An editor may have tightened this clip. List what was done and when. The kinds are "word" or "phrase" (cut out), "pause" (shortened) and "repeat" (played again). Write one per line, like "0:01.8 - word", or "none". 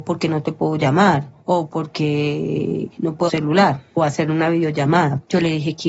0:01.4 - pause
0:02.9 - word
0:03.3 - phrase

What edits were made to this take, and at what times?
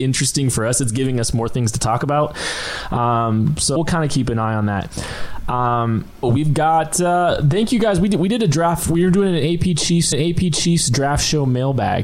0:03.8 - word
0:06.2 - word
0:10.1 - repeat

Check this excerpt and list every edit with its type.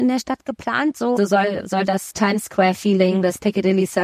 0:01.2 - word
0:02.1 - word

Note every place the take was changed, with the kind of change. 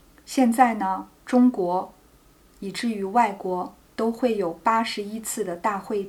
none

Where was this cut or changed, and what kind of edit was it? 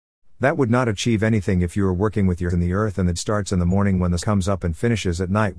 0:02.5 - word
0:03.2 - word
0:04.2 - word

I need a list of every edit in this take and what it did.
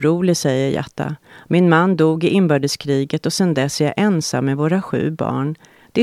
none

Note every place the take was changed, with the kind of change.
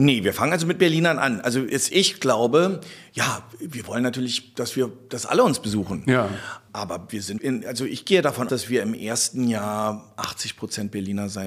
0:01.9 - word
0:07.4 - word
0:08.5 - word

